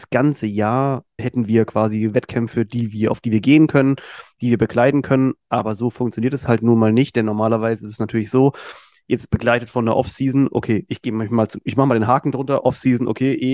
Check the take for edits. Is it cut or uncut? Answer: cut